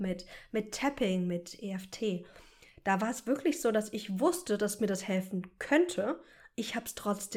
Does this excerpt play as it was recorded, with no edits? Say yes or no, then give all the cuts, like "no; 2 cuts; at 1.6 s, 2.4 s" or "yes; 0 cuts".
yes; 0 cuts